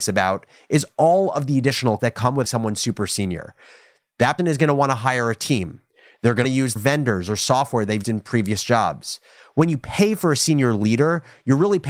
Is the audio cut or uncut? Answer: cut